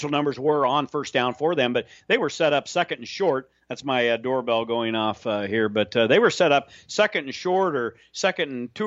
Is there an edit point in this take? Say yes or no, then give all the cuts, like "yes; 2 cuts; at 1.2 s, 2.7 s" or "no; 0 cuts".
no; 0 cuts